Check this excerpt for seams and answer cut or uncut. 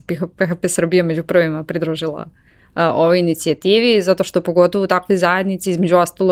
uncut